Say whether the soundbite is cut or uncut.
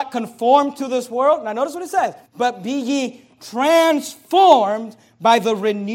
cut